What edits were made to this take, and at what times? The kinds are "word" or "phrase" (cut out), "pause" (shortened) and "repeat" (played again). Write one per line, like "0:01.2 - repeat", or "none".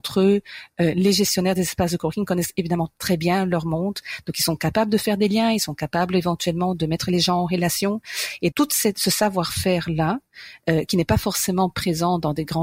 0:08.5 - word